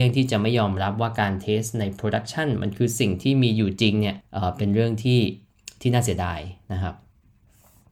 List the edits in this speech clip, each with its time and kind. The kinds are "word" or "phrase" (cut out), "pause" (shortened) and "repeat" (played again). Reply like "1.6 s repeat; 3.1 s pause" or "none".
4.2 s pause